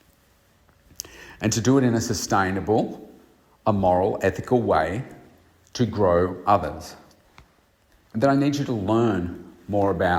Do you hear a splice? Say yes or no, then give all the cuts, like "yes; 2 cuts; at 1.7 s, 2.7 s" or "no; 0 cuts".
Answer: no; 0 cuts